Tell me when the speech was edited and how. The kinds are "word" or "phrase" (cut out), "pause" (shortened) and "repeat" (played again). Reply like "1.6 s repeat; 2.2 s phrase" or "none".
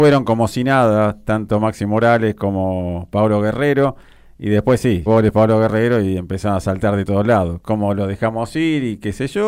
5.1 s word